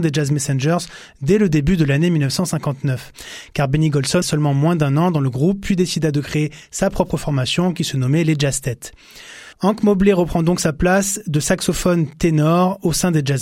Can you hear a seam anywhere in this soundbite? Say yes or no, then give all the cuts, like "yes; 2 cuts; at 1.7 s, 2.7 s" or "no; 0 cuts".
yes; 2 cuts; at 4.2 s, 9.5 s